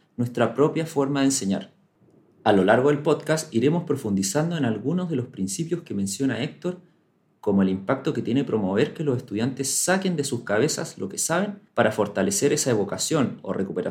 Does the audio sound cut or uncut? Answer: uncut